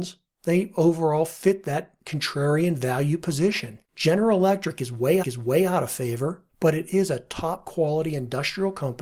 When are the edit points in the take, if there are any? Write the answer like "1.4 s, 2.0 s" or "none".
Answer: 3.8 s, 5.2 s, 6.5 s